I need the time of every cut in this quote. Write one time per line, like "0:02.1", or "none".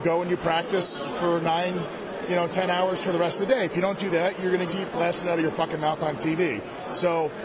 0:04.7